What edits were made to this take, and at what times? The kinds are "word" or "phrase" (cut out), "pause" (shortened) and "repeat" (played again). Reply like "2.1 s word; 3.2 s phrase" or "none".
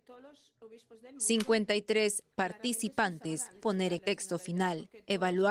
3.6 s word; 4.0 s word